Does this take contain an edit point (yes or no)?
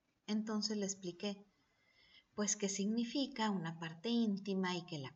no